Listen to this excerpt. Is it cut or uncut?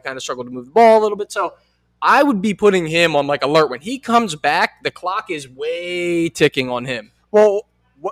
uncut